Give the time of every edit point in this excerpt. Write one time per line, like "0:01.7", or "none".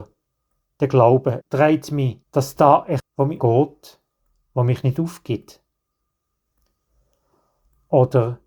0:01.4
0:02.2
0:03.0
0:03.4